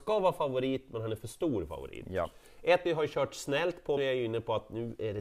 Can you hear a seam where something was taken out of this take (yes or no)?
yes